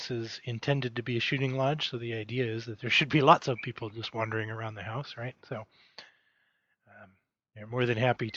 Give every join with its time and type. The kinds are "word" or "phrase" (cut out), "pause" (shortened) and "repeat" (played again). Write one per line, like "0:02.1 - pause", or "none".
none